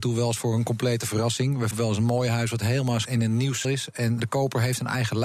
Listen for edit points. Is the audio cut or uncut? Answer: cut